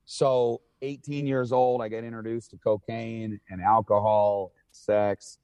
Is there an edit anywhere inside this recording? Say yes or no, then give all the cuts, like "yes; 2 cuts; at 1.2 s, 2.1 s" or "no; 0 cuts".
no; 0 cuts